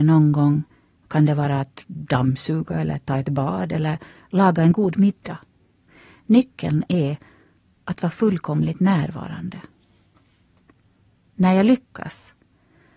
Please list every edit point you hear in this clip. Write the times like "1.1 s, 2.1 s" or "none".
5.8 s